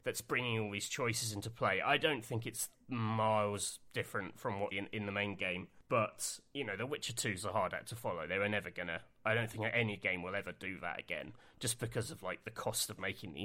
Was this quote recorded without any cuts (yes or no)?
no